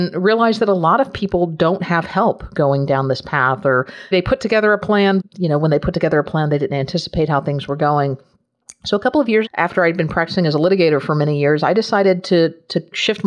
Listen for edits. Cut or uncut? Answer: cut